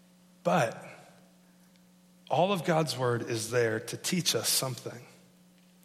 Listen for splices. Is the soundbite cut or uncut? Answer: uncut